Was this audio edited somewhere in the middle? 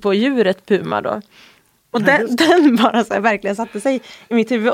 no; 0 cuts

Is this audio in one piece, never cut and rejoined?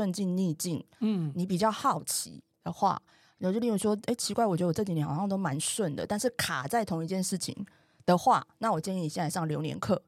yes; 0 cuts

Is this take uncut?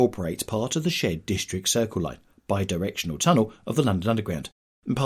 yes; 0 cuts

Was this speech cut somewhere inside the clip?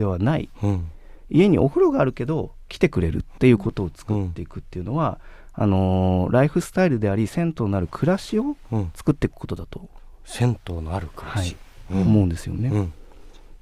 yes; 1 cut; at 3.4 s

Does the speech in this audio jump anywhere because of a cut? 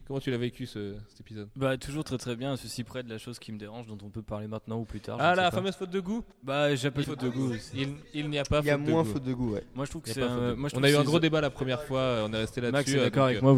yes; 2 cuts; at 6.3 s, 7.0 s

